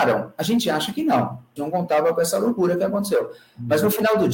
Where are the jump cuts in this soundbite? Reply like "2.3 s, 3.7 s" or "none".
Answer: 1.6 s

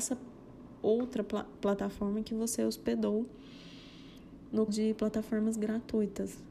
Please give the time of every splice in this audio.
4.7 s

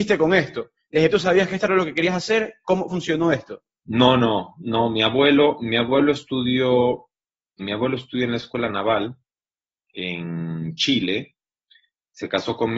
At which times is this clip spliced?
1.1 s, 2.9 s, 3.8 s, 7.6 s

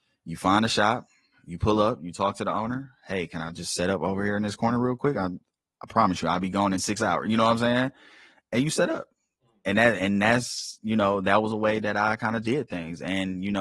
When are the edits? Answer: 10.0 s, 12.4 s

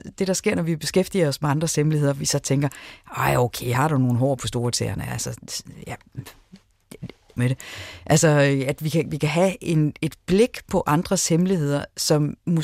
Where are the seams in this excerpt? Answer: 7.4 s

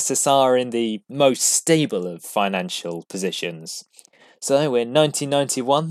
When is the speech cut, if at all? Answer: 1.0 s

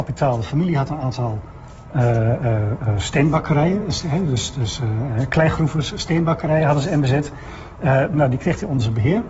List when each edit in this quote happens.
none

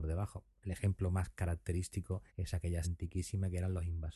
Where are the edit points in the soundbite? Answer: 2.3 s, 2.8 s

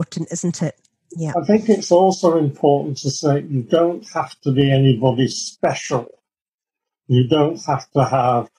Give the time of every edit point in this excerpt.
none

